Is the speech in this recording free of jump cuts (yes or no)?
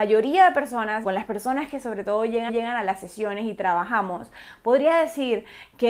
no